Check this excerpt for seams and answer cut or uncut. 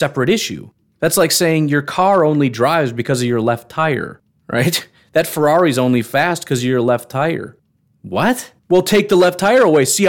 cut